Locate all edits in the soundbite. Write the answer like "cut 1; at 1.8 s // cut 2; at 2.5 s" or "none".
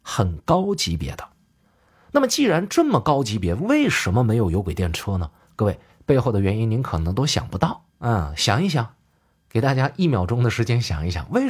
cut 1; at 7.9 s